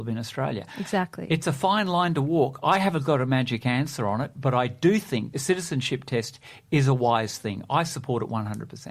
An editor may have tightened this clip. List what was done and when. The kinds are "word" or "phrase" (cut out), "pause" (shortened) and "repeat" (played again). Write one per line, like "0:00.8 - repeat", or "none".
none

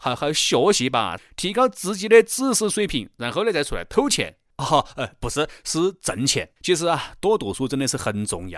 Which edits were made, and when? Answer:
0:01.2 - phrase
0:06.6 - pause

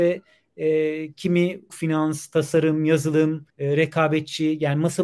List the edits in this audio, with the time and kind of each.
0:01.7 - word
0:03.5 - pause

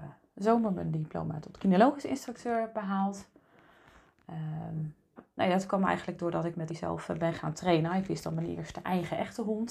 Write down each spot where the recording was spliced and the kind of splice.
0:05.2 - word
0:06.7 - word

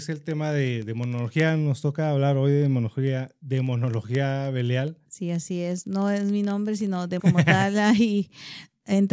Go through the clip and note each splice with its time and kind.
0:05.1 - pause
0:07.2 - word

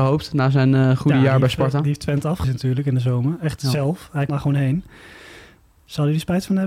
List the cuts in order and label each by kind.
0:02.4 - word
0:04.3 - word

